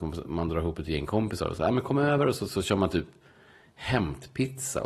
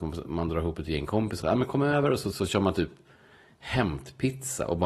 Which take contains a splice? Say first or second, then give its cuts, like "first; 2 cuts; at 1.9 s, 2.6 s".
second; 1 cut; at 1.4 s